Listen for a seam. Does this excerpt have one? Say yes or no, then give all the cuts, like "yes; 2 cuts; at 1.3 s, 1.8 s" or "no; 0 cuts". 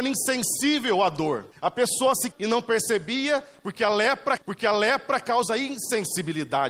yes; 3 cuts; at 1.5 s, 2.3 s, 4.4 s